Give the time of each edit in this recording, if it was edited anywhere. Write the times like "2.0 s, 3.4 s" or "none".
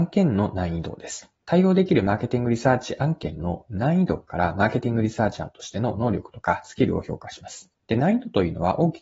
1.4 s, 7.8 s